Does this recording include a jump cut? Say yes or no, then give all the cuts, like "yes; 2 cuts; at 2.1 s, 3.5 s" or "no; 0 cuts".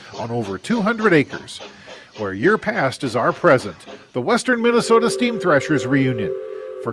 no; 0 cuts